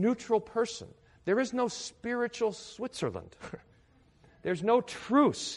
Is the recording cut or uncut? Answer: uncut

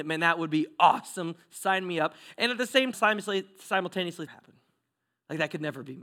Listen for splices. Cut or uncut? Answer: cut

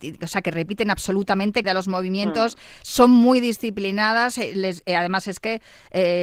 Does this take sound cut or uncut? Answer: cut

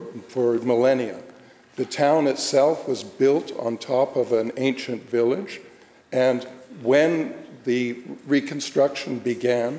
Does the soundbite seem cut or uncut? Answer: uncut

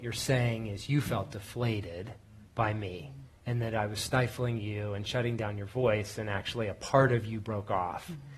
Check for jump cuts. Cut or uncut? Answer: cut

